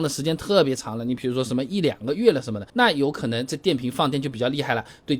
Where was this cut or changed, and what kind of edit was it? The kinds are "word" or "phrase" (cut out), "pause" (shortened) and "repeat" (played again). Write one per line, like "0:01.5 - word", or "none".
0:02.7 - pause